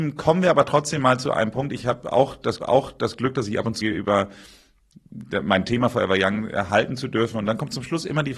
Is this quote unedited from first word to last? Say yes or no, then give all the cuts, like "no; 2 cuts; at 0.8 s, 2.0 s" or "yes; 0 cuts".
no; 2 cuts; at 2.6 s, 3.8 s